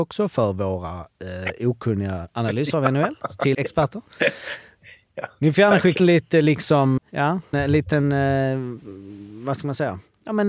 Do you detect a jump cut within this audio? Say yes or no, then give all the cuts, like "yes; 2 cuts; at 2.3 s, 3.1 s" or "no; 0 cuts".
yes; 4 cuts; at 3.5 s, 6.0 s, 7.0 s, 7.5 s